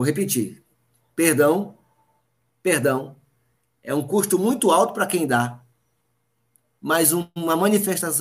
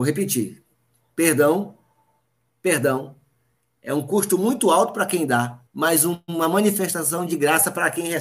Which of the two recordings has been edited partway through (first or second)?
second